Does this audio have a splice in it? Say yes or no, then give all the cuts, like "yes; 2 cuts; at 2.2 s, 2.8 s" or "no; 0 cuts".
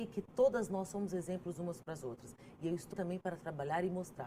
yes; 1 cut; at 2.9 s